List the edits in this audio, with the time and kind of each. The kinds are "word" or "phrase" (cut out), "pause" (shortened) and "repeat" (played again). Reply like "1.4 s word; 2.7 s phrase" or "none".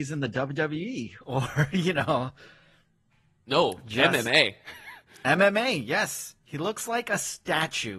none

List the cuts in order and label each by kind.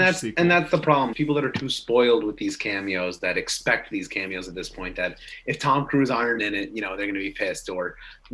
1.1 s word; 6.4 s phrase

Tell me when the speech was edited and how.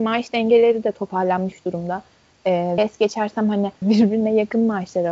2.8 s word; 3.8 s word

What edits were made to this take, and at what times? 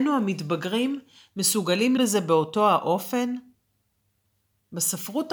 2.0 s word

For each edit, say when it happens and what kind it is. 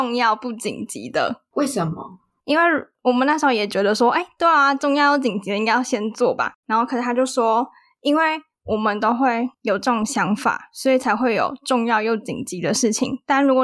none

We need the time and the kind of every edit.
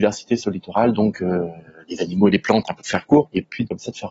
none

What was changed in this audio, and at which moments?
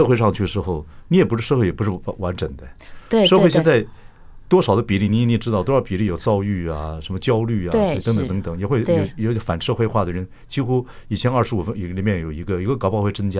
8.0 s phrase

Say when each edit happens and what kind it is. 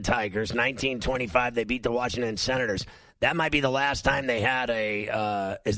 none

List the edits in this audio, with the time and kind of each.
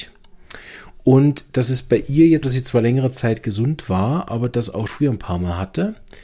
2.4 s word; 4.9 s word

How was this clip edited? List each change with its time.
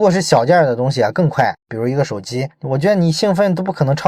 1.6 s pause

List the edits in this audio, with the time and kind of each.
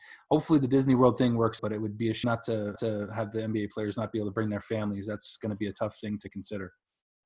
1.6 s word; 2.2 s word; 2.8 s repeat

